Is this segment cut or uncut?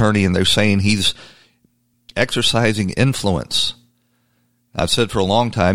uncut